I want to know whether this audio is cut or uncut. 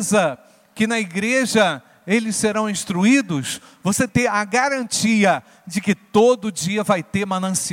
cut